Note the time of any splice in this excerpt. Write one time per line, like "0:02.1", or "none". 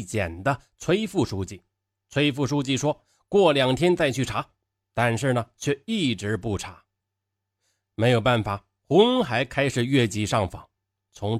none